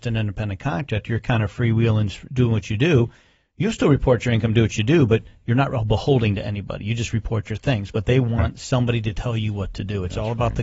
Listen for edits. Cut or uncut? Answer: uncut